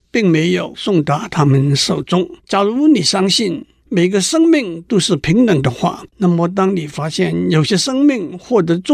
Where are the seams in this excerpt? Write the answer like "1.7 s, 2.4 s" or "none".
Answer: 2.4 s, 6.1 s